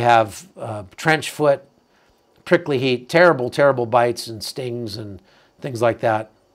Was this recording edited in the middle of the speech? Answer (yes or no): no